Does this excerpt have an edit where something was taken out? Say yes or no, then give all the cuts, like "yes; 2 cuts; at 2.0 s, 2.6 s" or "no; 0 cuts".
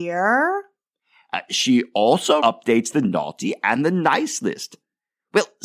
yes; 1 cut; at 2.4 s